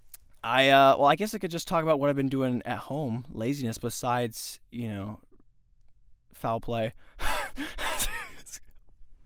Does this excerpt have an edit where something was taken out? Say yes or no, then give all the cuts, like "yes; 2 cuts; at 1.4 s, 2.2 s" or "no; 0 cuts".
no; 0 cuts